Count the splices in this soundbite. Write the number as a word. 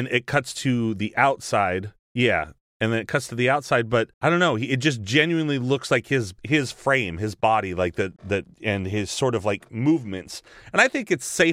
four